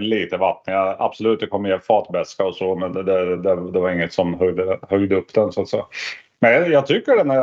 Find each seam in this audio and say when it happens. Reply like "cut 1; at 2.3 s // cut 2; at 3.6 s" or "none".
none